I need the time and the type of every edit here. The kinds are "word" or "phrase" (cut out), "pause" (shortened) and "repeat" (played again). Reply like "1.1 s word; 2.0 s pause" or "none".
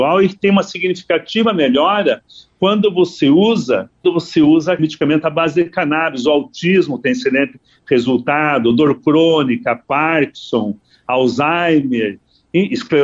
4.0 s word; 4.8 s word